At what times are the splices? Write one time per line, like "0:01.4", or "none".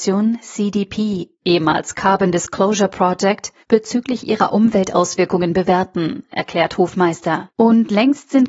0:01.3
0:03.6
0:07.5